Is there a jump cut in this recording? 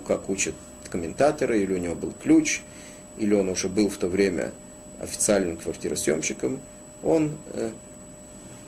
no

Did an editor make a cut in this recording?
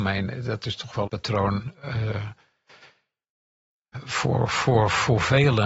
yes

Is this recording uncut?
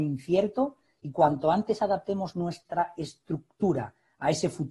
yes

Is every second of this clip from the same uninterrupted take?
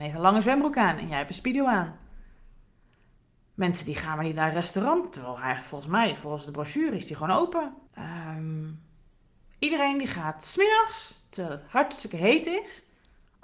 no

